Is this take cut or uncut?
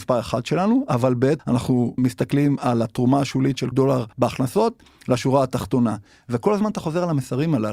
cut